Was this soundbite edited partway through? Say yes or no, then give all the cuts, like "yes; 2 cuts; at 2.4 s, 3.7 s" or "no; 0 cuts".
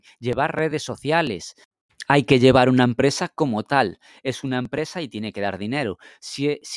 no; 0 cuts